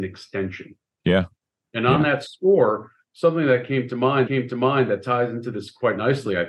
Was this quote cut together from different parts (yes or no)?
yes